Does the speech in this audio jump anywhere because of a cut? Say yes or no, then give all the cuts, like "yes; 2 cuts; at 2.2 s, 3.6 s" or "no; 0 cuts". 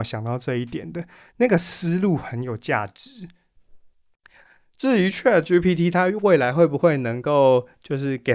no; 0 cuts